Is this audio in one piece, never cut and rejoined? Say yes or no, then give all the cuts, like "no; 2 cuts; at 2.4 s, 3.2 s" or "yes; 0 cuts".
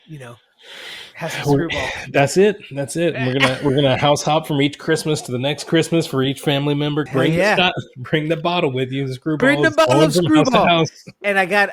no; 1 cut; at 7.1 s